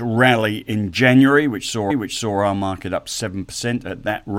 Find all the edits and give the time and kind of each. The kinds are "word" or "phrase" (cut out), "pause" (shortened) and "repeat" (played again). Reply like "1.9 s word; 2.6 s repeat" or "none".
1.9 s repeat